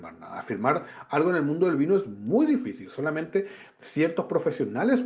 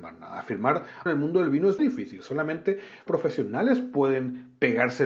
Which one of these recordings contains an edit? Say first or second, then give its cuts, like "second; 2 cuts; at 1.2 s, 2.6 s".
second; 3 cuts; at 1.1 s, 1.8 s, 3.1 s